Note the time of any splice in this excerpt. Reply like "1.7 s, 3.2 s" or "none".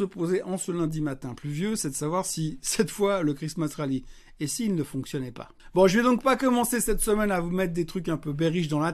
none